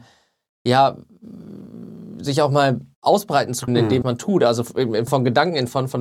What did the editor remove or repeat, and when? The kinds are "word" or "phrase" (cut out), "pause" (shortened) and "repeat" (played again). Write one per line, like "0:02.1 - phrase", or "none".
0:02.9 - pause
0:03.7 - word
0:04.0 - word
0:05.1 - word